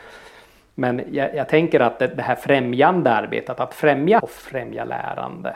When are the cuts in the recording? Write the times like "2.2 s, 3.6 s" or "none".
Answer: 4.2 s